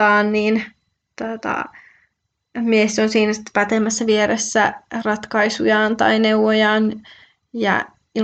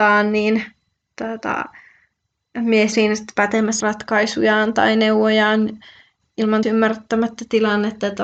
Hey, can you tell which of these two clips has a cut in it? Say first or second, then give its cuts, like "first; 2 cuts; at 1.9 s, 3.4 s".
second; 4 cuts; at 2.9 s, 3.8 s, 6.2 s, 6.6 s